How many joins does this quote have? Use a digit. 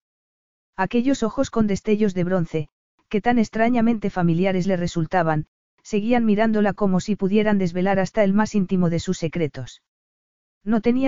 0